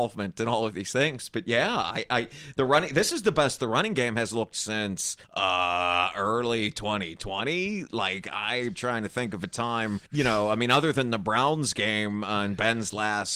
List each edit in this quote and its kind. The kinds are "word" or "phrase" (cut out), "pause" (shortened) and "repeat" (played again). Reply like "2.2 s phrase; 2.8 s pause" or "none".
5.2 s pause; 10.1 s pause